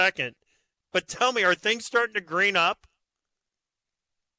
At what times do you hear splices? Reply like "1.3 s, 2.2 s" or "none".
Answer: none